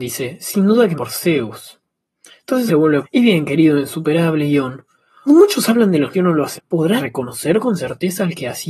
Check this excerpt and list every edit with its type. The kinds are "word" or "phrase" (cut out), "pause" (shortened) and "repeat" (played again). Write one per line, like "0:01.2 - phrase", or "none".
0:01.0 - word
0:02.7 - word
0:03.0 - word
0:05.3 - word
0:06.1 - word
0:06.6 - word
0:07.0 - word